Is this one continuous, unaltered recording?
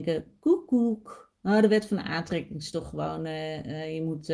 yes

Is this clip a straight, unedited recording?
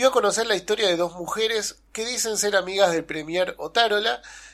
yes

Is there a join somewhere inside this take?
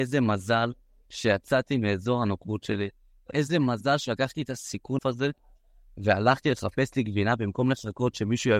yes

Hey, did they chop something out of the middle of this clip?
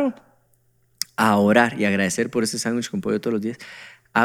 no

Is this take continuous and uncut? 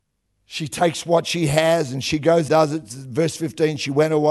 no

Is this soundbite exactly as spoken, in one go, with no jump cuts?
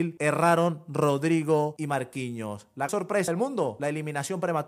no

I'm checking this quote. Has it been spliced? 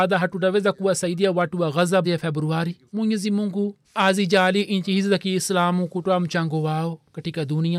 yes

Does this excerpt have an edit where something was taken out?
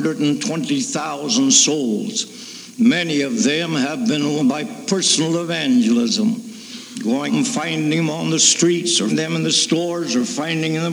yes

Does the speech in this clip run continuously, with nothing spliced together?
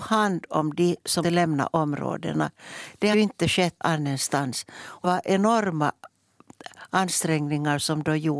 no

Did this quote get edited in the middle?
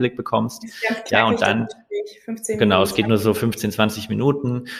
no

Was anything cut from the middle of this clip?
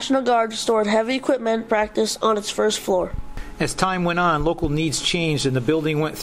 yes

